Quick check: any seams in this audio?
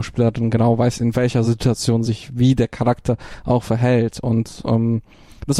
no; 0 cuts

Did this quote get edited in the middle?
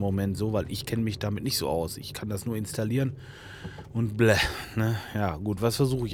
no; 0 cuts

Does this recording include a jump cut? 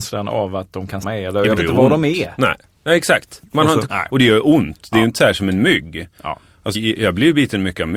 yes; 4 cuts; at 1.0 s, 1.6 s, 3.9 s, 6.7 s

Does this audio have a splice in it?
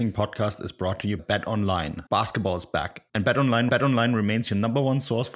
yes; 4 cuts; at 1.2 s, 2.1 s, 3.1 s, 3.7 s

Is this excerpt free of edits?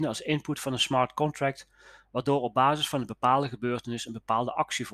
yes; 0 cuts

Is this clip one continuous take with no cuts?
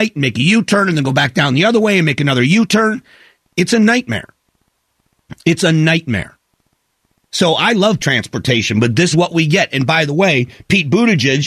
no; 2 cuts; at 8.0 s, 9.1 s

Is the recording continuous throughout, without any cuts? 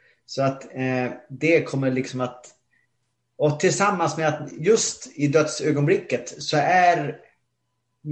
yes; 0 cuts

